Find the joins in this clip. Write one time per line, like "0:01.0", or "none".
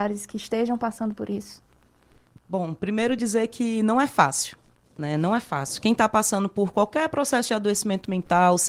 none